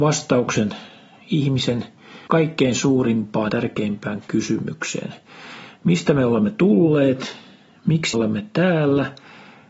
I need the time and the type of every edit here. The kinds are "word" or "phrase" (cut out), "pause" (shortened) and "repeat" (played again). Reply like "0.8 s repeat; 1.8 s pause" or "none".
2.3 s word; 3.5 s word; 8.1 s word